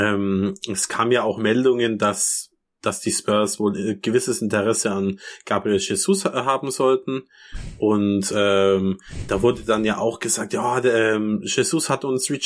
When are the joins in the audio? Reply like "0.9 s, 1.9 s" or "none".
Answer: none